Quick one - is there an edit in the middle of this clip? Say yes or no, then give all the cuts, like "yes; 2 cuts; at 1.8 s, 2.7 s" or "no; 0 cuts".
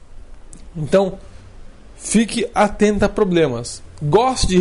no; 0 cuts